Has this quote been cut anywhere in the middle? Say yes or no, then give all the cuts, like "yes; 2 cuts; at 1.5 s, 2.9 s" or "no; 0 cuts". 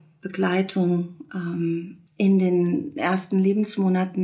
yes; 1 cut; at 2.1 s